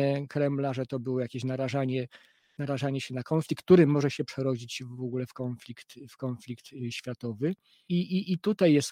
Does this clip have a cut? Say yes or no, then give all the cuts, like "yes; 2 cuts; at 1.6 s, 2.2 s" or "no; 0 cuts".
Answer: no; 0 cuts